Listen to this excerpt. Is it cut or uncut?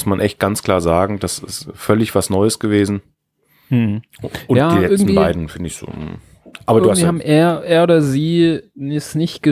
uncut